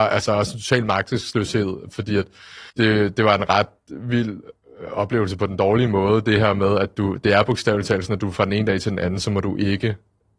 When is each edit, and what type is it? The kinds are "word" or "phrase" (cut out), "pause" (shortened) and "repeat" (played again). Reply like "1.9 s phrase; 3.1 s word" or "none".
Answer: 2.7 s pause